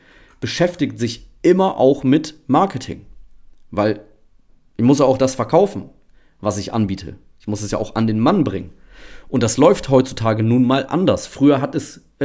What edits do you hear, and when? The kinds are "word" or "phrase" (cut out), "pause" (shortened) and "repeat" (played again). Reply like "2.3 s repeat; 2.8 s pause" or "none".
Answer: none